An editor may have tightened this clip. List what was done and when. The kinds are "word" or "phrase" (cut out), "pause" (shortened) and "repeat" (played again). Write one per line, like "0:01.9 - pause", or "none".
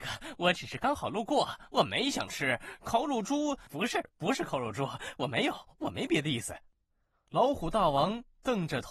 0:03.7 - word